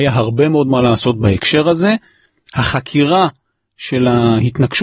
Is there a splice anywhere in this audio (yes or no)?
no